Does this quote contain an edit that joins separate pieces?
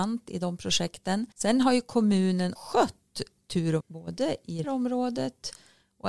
yes; 4 cuts; at 1.3 s, 2.6 s, 3.8 s, 4.6 s

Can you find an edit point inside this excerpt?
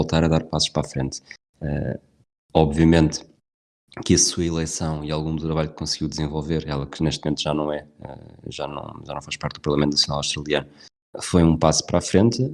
no; 0 cuts

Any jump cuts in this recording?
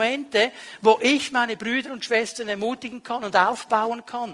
no; 0 cuts

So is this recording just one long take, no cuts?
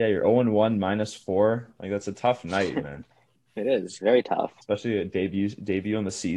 no; 2 cuts; at 3.1 s, 4.6 s

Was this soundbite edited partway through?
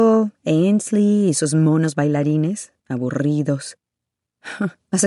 yes; 1 cut; at 2.8 s

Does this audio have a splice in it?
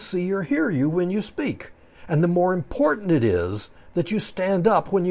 no; 0 cuts

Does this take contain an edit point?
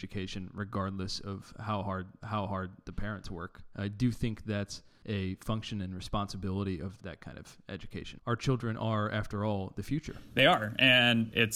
yes; 2 cuts; at 2.2 s, 7.0 s

